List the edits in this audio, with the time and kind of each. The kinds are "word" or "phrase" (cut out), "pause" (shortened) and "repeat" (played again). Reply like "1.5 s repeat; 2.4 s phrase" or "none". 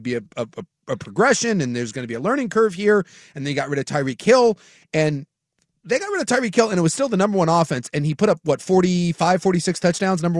none